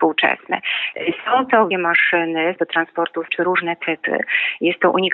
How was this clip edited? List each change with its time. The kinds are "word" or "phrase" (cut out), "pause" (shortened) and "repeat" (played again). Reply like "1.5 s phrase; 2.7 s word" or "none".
1.7 s word; 2.6 s word; 3.3 s phrase